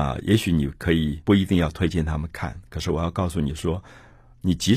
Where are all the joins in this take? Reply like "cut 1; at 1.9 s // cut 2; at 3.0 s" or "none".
cut 1; at 1.2 s

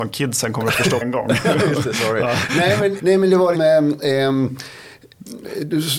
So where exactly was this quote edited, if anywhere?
cut 1; at 1.0 s // cut 2; at 3.0 s // cut 3; at 3.5 s

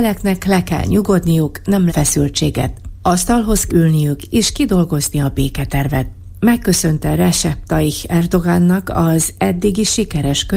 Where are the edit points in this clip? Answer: cut 1; at 1.9 s // cut 2; at 3.7 s

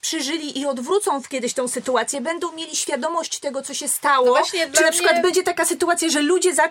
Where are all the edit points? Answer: none

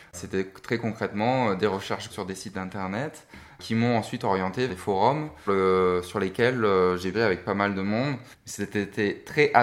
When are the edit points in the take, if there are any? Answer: cut 1; at 2.1 s // cut 2; at 4.7 s // cut 3; at 5.5 s // cut 4; at 7.1 s // cut 5; at 8.3 s

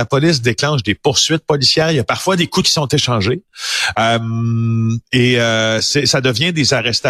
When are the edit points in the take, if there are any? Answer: cut 1; at 2.6 s

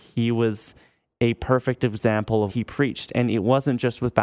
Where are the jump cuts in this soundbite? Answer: cut 1; at 2.5 s

